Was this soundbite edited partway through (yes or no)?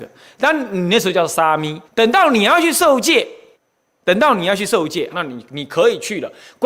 yes